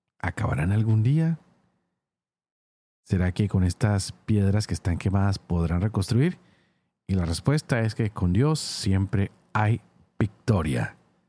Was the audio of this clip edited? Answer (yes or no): no